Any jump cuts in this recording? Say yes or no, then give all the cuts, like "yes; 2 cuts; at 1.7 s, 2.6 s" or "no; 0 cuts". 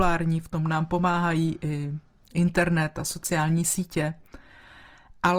no; 0 cuts